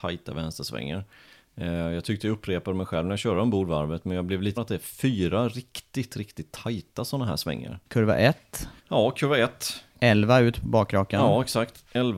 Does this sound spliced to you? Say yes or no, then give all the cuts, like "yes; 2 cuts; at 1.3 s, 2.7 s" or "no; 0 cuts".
yes; 3 cuts; at 4.6 s, 7.8 s, 8.8 s